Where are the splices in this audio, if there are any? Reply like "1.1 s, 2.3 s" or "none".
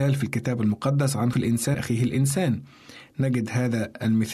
1.3 s, 1.7 s